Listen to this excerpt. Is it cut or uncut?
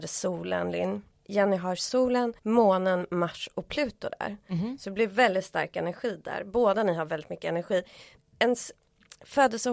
cut